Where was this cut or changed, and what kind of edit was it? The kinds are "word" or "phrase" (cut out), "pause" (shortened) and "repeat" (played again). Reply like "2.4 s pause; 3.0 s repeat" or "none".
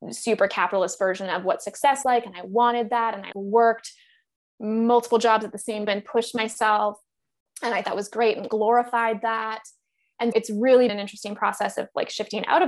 2.0 s word; 3.3 s word; 5.9 s word; 7.8 s word; 8.5 s word; 10.3 s word; 10.9 s word